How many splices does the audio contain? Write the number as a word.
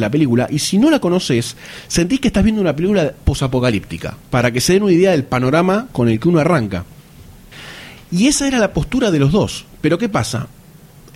one